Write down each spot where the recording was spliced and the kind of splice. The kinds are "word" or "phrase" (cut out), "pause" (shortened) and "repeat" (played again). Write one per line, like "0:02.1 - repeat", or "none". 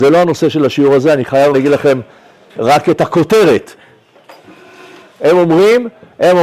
0:01.5 - word
0:02.5 - word